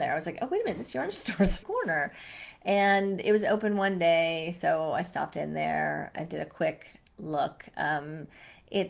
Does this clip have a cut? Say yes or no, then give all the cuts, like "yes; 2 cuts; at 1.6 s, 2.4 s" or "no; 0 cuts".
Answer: yes; 1 cut; at 1.6 s